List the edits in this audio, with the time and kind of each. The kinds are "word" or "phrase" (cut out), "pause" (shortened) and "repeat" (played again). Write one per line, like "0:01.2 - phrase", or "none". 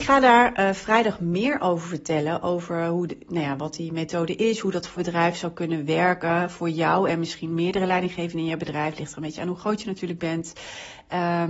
0:05.0 - word